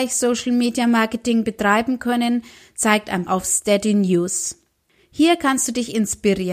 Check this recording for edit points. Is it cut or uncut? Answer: cut